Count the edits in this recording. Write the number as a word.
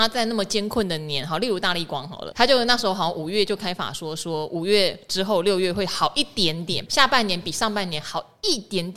two